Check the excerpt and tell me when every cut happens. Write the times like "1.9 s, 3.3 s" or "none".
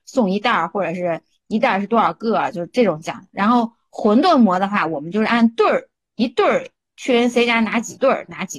none